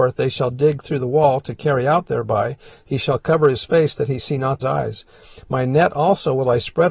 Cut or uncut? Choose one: cut